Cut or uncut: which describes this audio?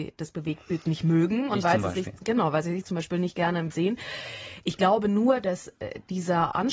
cut